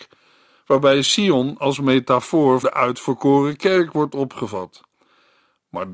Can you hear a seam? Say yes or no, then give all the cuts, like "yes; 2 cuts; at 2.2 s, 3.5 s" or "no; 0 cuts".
yes; 1 cut; at 2.6 s